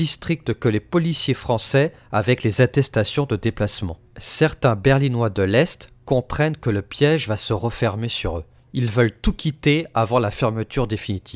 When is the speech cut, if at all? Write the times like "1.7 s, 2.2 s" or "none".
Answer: 4.1 s, 8.6 s